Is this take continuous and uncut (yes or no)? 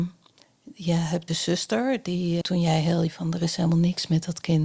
no